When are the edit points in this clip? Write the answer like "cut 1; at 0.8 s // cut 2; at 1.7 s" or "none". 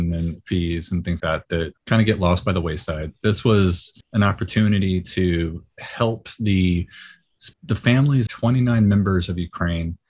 cut 1; at 1.2 s // cut 2; at 1.8 s // cut 3; at 4.0 s // cut 4; at 7.5 s // cut 5; at 8.3 s